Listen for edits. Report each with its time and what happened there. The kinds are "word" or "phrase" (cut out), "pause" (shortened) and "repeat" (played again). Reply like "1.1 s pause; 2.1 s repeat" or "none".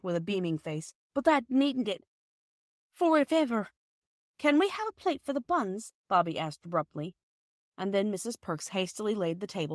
1.0 s pause; 1.8 s phrase; 6.0 s pause